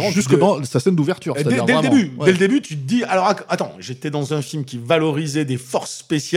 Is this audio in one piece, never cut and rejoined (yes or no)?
yes